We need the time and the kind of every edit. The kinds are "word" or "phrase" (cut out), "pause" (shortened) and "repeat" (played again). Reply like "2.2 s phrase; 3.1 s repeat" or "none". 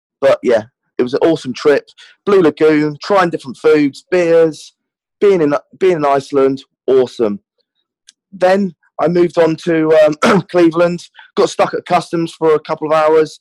none